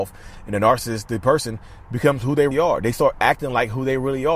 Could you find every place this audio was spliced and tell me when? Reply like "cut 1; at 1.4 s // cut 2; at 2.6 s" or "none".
cut 1; at 2.5 s